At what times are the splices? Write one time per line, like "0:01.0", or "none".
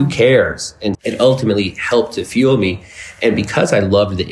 0:00.9